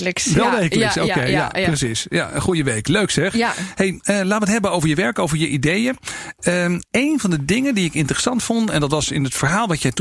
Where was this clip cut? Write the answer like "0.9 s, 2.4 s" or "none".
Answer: 6.9 s